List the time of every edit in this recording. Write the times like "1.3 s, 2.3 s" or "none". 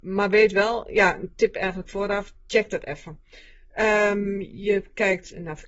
2.3 s